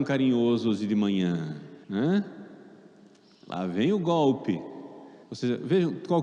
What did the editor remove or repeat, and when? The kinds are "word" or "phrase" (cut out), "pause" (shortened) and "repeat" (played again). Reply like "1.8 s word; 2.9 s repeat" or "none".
1.8 s pause; 5.2 s pause